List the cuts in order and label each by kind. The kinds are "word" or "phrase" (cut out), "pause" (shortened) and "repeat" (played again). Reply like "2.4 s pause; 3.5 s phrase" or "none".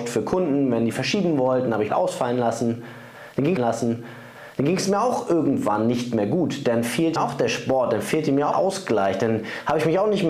1.9 s phrase; 3.6 s repeat; 7.2 s word; 8.5 s phrase